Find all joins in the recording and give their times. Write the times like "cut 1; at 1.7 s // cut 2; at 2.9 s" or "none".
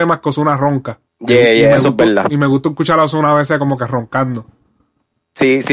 cut 1; at 1.1 s